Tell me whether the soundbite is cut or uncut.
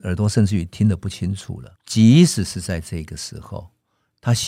cut